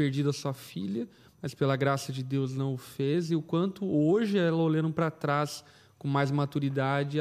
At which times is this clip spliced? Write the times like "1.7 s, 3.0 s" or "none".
none